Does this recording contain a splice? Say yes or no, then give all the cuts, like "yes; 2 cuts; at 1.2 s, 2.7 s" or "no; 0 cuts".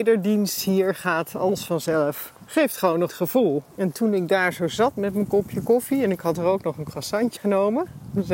yes; 4 cuts; at 2.4 s, 3.1 s, 3.7 s, 7.4 s